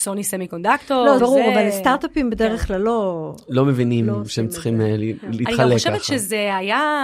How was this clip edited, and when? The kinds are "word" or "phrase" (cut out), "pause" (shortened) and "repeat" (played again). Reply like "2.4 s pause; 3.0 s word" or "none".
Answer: 1.2 s phrase